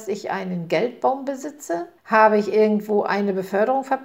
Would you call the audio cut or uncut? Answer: cut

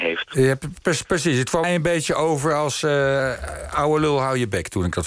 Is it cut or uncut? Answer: cut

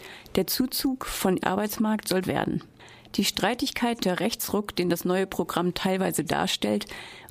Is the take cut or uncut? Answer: cut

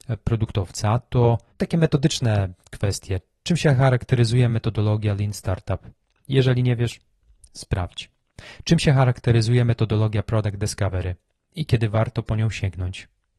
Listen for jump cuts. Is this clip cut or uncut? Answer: uncut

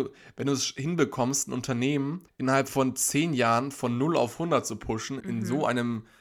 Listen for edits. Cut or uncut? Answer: cut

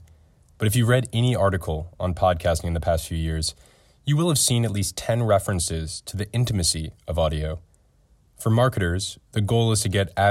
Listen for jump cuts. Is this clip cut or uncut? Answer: uncut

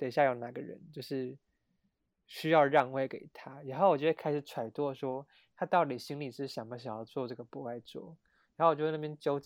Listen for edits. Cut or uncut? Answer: uncut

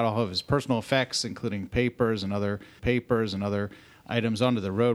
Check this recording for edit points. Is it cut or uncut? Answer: cut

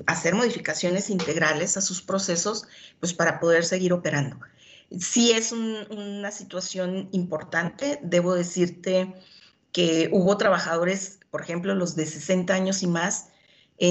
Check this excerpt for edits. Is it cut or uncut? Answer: uncut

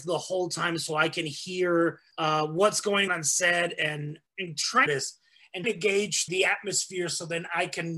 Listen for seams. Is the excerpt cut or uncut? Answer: cut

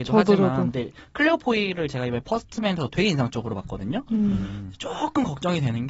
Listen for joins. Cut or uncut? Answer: uncut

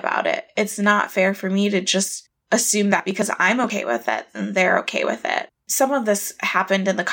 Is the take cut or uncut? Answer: uncut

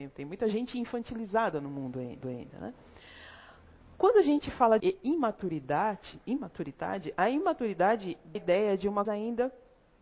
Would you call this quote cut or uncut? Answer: cut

